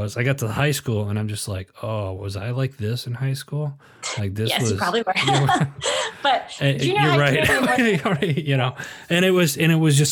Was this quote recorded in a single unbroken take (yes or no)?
yes